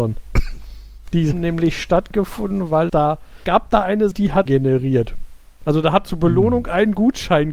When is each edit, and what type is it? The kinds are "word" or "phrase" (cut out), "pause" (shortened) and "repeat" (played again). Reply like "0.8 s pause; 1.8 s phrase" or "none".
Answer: 1.3 s word; 2.9 s word; 3.4 s word; 4.1 s word; 4.5 s word; 6.0 s word